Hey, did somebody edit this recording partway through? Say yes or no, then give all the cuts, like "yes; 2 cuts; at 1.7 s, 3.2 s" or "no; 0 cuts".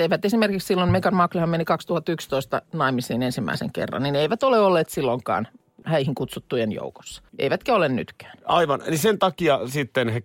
yes; 2 cuts; at 5.8 s, 7.3 s